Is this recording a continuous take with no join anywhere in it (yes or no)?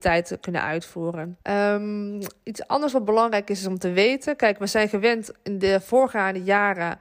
no